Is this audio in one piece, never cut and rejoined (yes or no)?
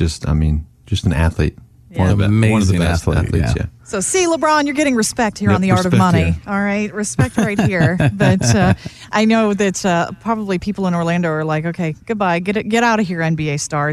yes